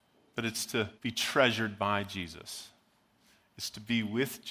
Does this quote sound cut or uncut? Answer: cut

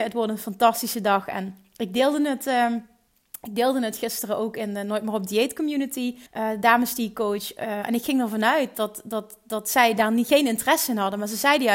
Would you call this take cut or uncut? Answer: cut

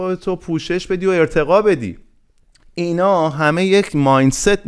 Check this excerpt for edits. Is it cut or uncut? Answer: uncut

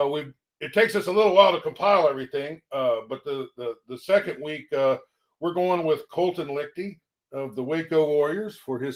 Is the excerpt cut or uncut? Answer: uncut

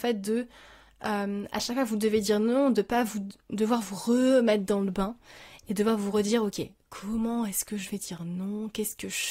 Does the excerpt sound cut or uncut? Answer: uncut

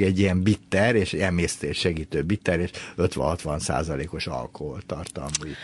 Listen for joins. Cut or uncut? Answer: uncut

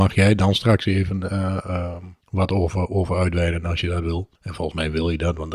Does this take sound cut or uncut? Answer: cut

